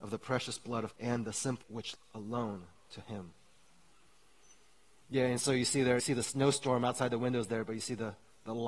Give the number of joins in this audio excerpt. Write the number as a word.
four